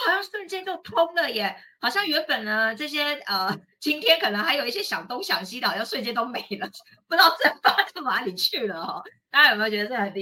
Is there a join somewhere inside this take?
no; 0 cuts

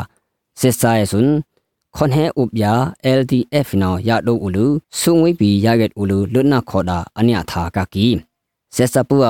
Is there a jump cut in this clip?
yes; 1 cut; at 4.8 s

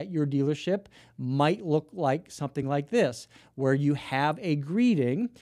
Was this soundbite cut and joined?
no; 0 cuts

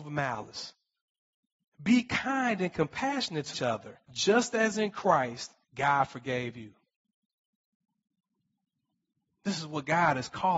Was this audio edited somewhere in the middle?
yes; 3 cuts; at 3.5 s, 4.0 s, 5.6 s

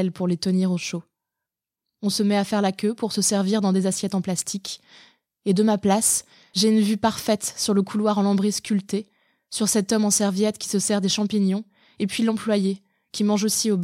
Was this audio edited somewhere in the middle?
no; 0 cuts

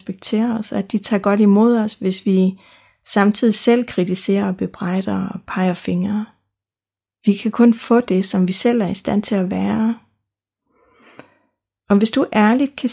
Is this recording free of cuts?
yes; 0 cuts

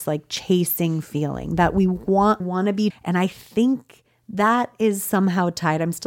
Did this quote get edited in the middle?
yes; 2 cuts; at 2.4 s, 2.9 s

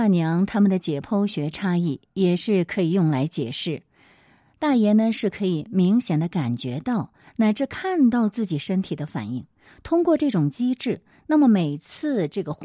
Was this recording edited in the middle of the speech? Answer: no; 0 cuts

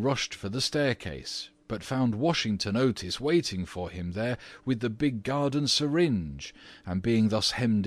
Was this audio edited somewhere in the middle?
no; 0 cuts

